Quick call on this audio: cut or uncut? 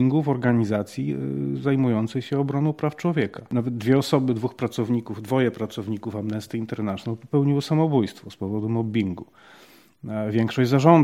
uncut